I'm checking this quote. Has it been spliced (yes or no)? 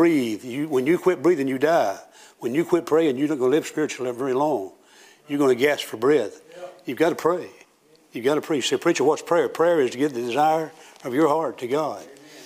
no